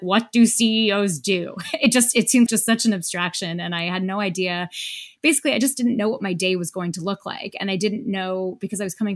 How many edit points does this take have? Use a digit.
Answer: 1